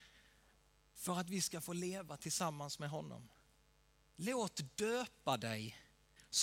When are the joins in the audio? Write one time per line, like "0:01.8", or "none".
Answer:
none